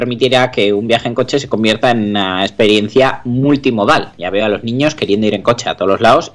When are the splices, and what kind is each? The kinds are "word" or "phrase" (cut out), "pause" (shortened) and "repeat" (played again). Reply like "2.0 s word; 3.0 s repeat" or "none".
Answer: none